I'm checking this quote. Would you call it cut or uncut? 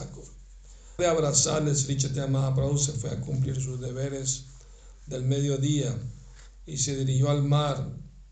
cut